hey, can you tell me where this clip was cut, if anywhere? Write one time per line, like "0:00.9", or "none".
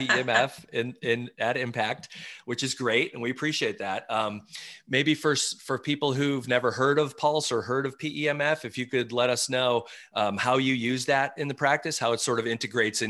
none